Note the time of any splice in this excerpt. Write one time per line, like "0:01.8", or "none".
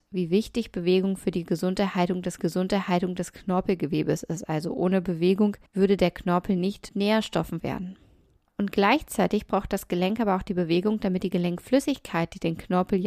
0:02.4
0:05.7
0:06.9
0:07.6